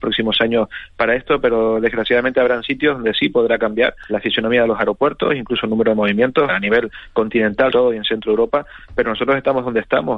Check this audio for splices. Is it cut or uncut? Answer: cut